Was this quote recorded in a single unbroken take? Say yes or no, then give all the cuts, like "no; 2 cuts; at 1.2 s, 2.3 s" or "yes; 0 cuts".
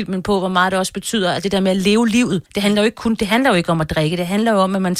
no; 1 cut; at 2.5 s